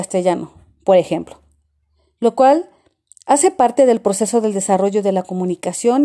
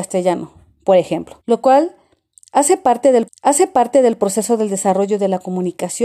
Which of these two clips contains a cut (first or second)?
second